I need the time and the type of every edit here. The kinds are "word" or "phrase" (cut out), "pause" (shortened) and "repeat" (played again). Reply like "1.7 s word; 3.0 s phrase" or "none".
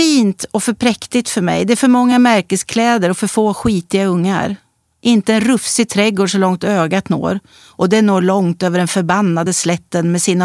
none